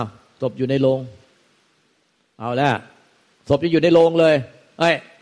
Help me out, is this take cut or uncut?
uncut